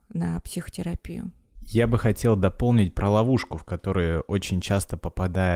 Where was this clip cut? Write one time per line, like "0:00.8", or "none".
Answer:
none